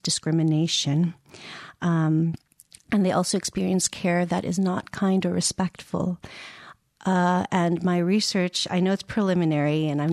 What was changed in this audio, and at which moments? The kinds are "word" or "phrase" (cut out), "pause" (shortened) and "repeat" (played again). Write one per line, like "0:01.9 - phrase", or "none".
none